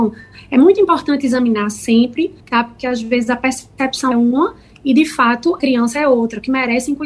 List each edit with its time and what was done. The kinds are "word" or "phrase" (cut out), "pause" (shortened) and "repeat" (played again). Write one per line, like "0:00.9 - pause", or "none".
0:02.4 - pause
0:04.1 - phrase
0:05.6 - phrase